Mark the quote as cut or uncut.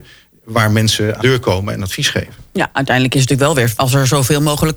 cut